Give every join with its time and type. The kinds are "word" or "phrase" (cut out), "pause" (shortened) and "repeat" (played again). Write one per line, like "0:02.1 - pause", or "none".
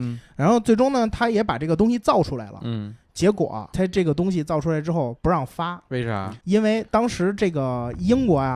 0:06.4 - pause